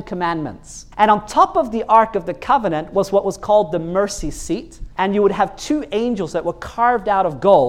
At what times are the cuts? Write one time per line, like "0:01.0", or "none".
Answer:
0:00.9
0:04.9